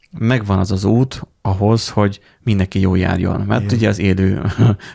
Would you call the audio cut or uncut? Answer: uncut